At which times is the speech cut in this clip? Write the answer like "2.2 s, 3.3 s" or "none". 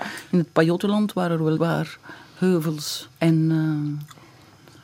1.6 s, 3.2 s